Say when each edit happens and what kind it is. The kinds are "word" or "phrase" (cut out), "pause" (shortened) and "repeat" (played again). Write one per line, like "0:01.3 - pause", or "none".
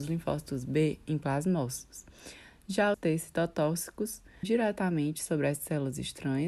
0:02.9 - word
0:04.4 - word